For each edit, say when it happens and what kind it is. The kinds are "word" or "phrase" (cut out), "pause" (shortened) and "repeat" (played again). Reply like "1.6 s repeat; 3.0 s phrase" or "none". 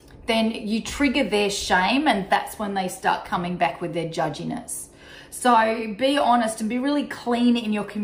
none